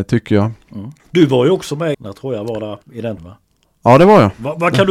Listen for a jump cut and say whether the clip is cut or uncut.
cut